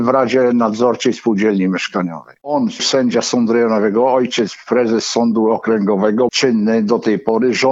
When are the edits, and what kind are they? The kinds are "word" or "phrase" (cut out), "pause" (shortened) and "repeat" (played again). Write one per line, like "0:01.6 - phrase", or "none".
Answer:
0:02.8 - word
0:06.3 - phrase